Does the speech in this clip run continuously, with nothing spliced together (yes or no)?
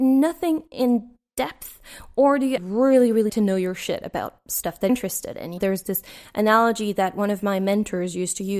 no